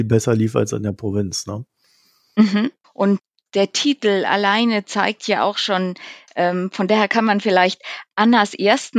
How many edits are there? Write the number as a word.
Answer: zero